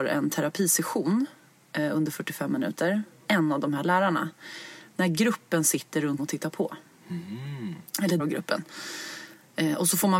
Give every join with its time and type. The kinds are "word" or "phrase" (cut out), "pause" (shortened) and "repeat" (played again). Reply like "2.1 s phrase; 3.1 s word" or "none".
3.2 s word; 6.2 s word; 8.2 s word